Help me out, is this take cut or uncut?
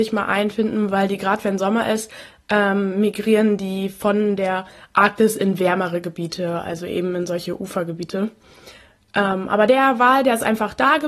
uncut